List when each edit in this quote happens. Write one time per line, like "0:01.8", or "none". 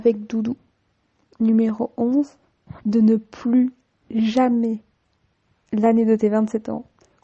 none